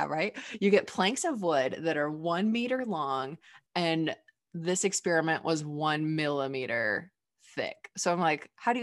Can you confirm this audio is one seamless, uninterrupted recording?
yes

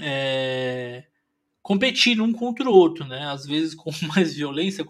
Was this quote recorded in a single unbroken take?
yes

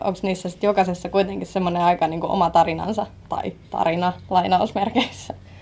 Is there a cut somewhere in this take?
no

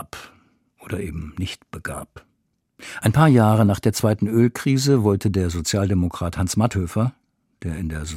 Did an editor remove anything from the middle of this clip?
no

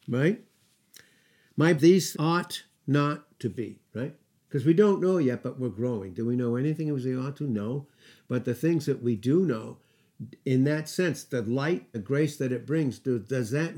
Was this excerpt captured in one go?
no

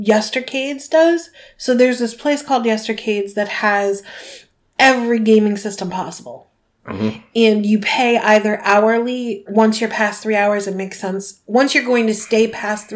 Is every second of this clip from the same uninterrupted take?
no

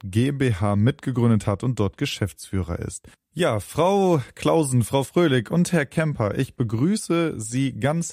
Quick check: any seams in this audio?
no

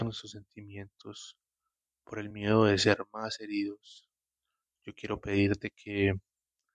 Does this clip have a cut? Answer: no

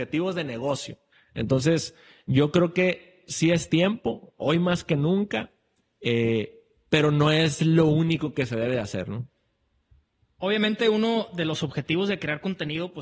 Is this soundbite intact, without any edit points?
yes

